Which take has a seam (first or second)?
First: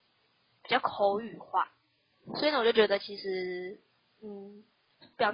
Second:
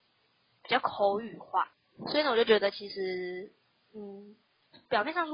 second